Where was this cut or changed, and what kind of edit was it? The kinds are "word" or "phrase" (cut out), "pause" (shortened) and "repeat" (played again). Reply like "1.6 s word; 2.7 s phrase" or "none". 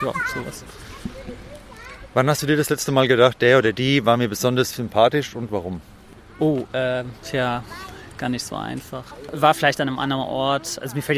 none

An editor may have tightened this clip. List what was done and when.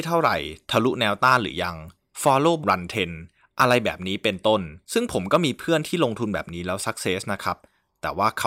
2.6 s word; 4.8 s pause

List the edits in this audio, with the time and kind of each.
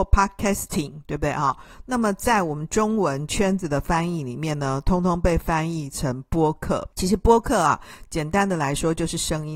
6.9 s pause

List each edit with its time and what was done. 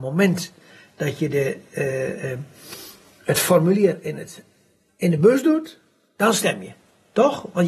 none

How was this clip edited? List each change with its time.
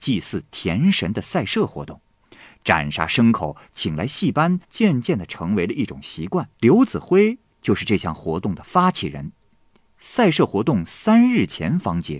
4.6 s pause; 6.5 s pause

